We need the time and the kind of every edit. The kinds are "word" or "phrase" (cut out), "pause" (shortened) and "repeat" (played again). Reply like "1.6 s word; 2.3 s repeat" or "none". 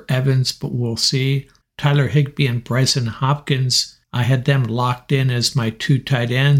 1.6 s pause; 4.0 s pause